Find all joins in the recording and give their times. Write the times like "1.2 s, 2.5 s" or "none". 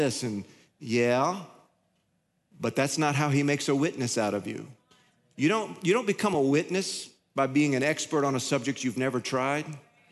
none